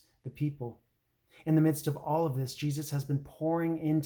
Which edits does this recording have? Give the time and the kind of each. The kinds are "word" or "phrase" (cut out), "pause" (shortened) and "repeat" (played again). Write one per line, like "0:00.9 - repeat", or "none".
none